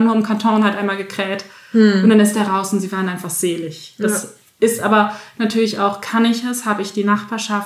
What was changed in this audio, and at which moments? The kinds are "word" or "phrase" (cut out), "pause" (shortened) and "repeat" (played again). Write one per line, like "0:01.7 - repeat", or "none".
none